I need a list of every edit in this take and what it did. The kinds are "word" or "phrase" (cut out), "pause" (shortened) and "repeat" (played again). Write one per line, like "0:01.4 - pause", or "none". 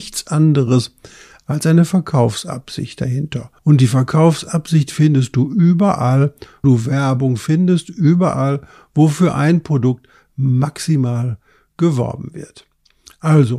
0:03.6 - pause
0:06.6 - word